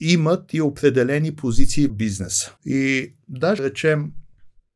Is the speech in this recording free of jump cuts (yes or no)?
no